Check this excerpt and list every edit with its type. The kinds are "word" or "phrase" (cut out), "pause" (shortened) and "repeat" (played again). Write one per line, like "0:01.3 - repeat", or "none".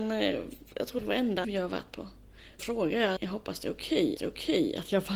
0:01.0 - word
0:01.4 - word
0:02.6 - word
0:03.2 - word
0:04.2 - repeat